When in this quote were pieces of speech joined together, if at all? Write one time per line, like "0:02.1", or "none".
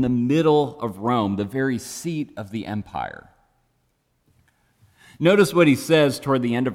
none